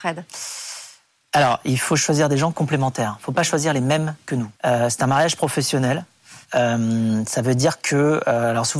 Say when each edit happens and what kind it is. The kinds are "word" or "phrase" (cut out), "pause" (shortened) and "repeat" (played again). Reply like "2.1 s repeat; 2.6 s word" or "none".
4.6 s pause; 6.4 s pause